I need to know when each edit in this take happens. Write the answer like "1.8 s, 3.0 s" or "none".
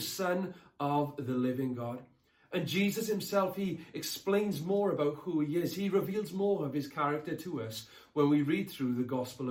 none